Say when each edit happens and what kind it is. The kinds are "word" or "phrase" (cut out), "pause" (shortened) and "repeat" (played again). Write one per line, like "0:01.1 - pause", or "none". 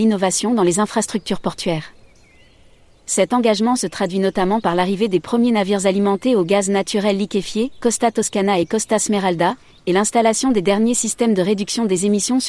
none